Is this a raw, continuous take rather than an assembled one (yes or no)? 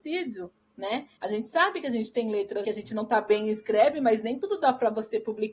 no